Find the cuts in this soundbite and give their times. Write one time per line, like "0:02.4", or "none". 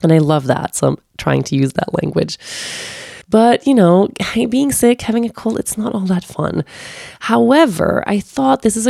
0:03.2